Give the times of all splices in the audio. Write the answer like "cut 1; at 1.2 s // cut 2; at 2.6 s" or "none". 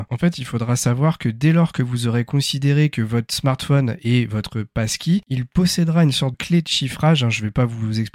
cut 1; at 6.3 s